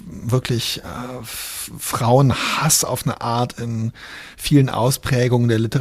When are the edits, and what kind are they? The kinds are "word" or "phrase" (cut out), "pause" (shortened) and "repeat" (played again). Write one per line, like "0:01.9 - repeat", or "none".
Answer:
none